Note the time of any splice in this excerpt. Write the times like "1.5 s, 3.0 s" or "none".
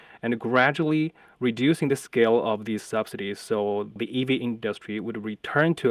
none